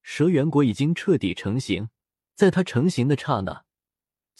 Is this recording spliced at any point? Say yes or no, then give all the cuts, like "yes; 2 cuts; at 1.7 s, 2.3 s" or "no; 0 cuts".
no; 0 cuts